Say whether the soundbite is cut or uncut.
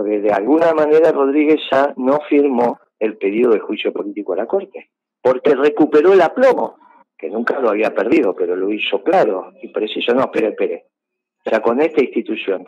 cut